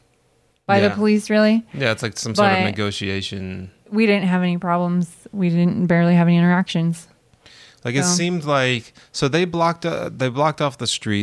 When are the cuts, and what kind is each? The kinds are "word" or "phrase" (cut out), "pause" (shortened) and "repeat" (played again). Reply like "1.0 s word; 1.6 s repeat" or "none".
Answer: none

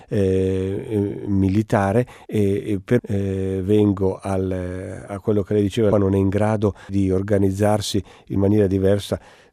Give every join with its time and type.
2.2 s word; 3.0 s word; 5.1 s word; 5.9 s word; 6.9 s word; 8.4 s word

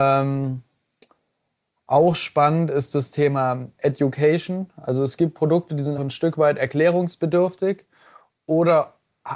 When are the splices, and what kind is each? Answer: 6.0 s word

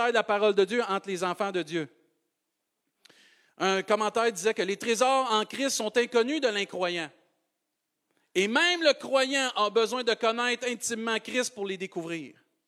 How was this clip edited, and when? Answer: none

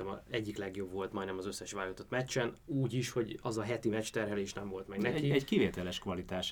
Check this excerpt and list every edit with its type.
2.6 s pause

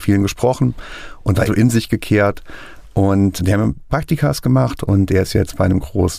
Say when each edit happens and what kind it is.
1.5 s word; 3.4 s word; 3.9 s word

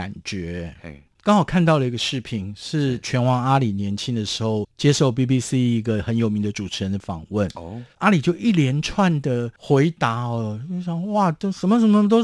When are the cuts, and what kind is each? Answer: 4.7 s pause; 7.9 s pause

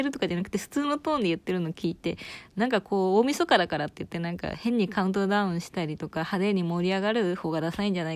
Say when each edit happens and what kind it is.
none

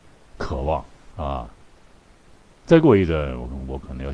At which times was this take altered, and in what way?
2.4 s pause

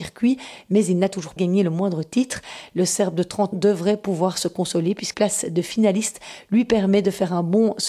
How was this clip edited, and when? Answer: 1.4 s word; 3.5 s word; 5.1 s word

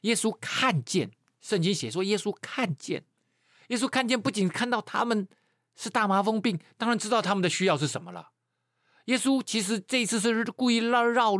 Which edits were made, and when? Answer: none

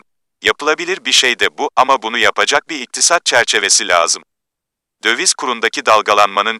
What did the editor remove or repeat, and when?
none

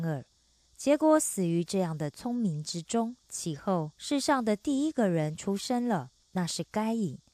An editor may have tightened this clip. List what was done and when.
3.2 s pause; 3.9 s pause; 6.2 s pause

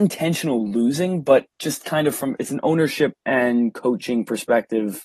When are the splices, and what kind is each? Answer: 1.5 s pause; 2.4 s word; 3.2 s pause

